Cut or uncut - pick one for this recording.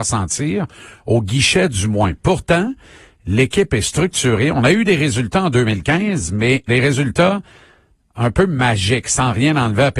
cut